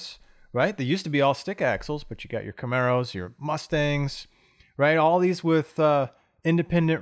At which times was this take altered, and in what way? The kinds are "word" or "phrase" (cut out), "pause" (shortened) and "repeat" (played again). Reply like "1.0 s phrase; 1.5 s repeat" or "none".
none